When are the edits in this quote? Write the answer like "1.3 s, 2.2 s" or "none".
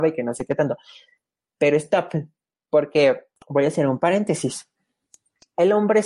3.4 s